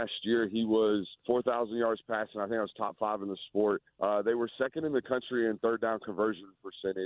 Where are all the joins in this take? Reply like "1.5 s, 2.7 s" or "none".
1.2 s, 3.9 s